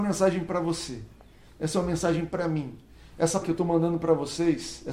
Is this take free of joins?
no; 1 cut; at 3.4 s

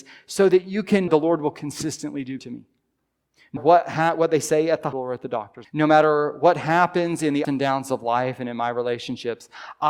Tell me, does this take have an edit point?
yes; 6 cuts; at 1.1 s, 2.4 s, 3.6 s, 4.9 s, 5.6 s, 7.4 s

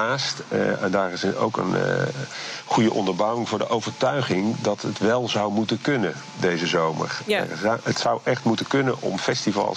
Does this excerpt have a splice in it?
no; 0 cuts

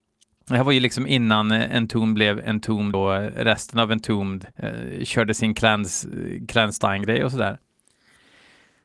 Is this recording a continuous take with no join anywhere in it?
no; 2 cuts; at 2.9 s, 4.5 s

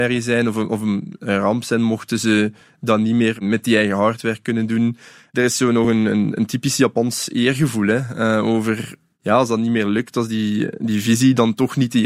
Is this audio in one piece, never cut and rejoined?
yes; 0 cuts

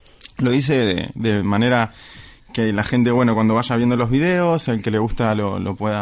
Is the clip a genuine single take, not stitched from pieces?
yes; 0 cuts

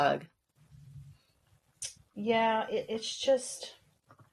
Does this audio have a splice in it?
yes; 1 cut; at 2.0 s

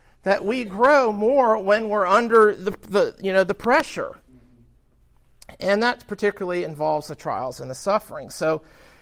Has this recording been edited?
no; 0 cuts

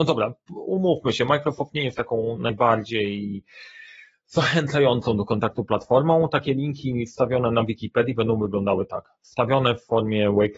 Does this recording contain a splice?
no; 0 cuts

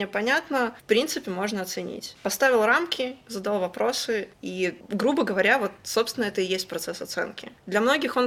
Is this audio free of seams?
yes; 0 cuts

